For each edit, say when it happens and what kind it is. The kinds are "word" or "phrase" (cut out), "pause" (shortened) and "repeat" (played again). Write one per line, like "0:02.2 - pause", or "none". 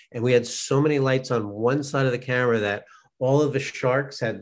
none

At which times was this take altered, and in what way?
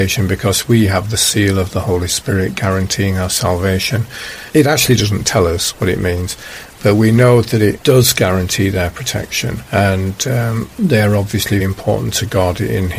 0:11.6 - word

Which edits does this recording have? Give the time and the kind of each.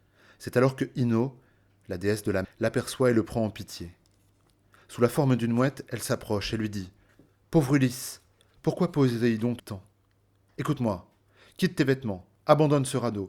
0:02.4 - word
0:09.6 - word

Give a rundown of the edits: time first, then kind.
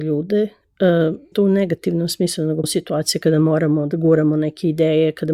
0:01.3 - phrase
0:02.6 - phrase

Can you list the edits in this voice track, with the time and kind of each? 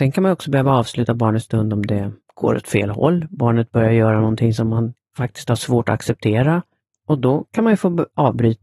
0:02.2 - pause

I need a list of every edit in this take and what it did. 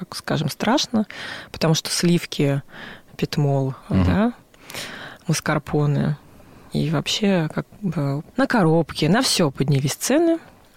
0:03.8 - pause
0:08.3 - phrase

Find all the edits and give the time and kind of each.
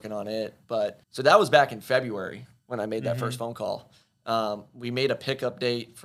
0:01.0 - pause

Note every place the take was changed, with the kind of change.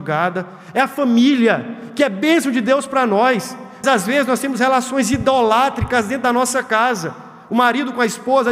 0:03.8 - word

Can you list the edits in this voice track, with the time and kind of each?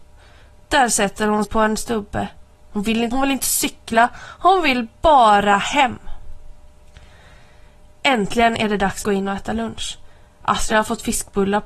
0:01.4 - word
0:03.1 - word
0:09.0 - word

